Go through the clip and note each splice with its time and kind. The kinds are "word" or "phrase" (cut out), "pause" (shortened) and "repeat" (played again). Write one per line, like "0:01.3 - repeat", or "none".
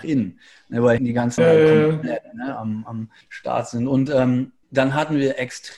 0:01.0 - word
0:01.4 - word
0:03.2 - pause
0:04.6 - pause